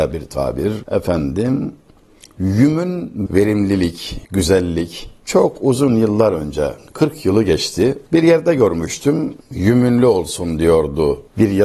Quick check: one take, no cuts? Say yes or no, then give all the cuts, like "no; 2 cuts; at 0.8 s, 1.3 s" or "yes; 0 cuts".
no; 2 cuts; at 3.3 s, 4.2 s